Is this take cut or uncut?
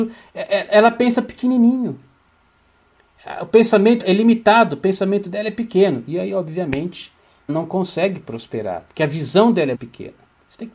cut